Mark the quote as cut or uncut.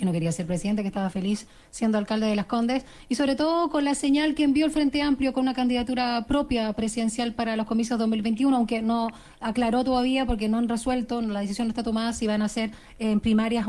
uncut